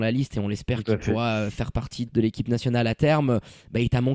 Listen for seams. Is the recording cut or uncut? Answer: cut